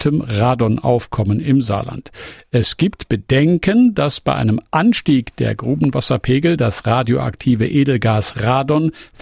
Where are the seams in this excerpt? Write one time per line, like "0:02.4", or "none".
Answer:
none